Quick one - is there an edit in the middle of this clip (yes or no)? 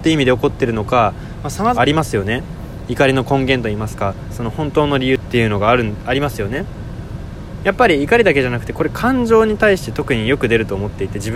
yes